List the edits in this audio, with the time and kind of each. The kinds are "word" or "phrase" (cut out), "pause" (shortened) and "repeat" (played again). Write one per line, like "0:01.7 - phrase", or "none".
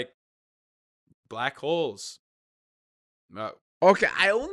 none